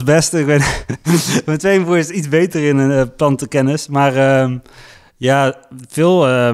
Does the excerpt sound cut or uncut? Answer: uncut